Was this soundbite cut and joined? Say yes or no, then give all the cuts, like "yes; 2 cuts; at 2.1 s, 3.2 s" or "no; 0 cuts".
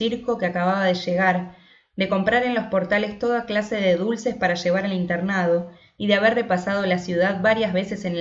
no; 0 cuts